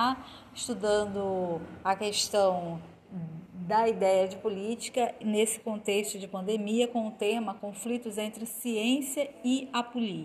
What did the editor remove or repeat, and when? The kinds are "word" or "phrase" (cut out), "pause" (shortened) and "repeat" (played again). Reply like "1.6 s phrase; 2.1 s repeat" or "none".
none

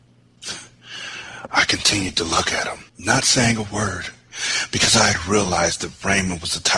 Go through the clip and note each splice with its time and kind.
2.9 s pause

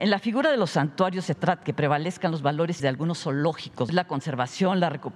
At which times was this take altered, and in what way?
1.3 s word; 1.6 s word; 2.8 s word; 3.9 s phrase

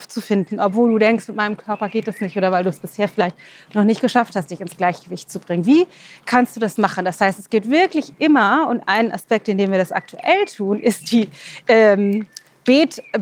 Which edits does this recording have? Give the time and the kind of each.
none

